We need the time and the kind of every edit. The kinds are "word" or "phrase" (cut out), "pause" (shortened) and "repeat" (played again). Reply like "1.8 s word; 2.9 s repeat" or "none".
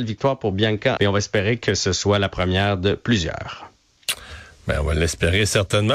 1.0 s word

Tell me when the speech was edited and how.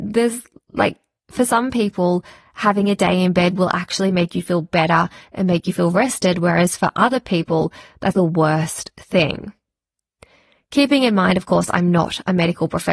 8.1 s word

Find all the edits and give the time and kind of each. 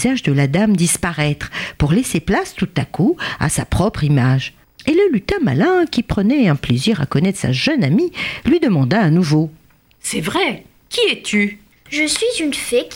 none

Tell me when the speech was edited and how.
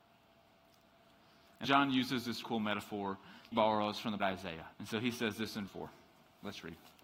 1.6 s word; 2.4 s word; 3.5 s phrase; 4.2 s word; 4.7 s pause; 5.7 s word

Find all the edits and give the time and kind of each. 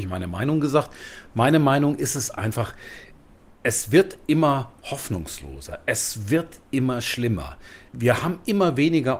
none

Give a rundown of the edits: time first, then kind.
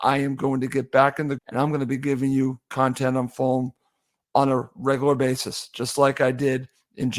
1.4 s word

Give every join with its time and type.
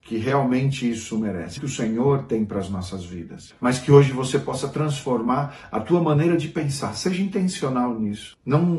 1.6 s word

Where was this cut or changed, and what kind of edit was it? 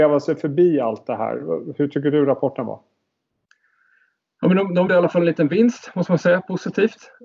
4.9 s word

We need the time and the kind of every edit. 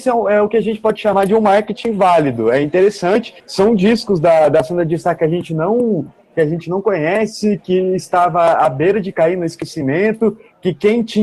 3.4 s pause

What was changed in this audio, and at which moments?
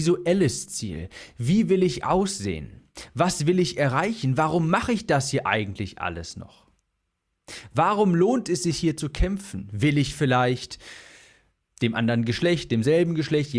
none

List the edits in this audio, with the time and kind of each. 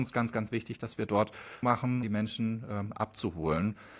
1.6 s word; 2.0 s word

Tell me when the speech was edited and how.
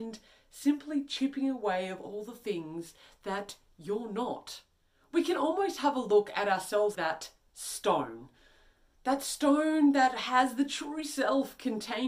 6.9 s word

